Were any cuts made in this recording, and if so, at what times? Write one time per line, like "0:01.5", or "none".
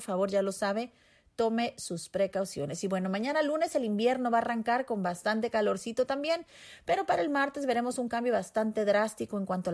none